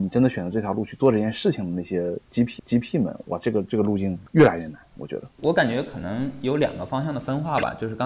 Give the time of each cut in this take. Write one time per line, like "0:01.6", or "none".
0:02.6
0:04.3
0:05.3